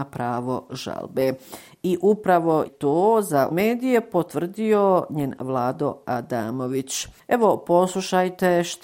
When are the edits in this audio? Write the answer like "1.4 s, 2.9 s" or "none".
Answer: 2.7 s, 3.5 s, 5.4 s